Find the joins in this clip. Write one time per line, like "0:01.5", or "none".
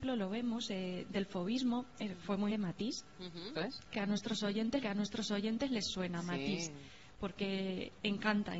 0:02.5
0:03.5
0:03.9
0:04.8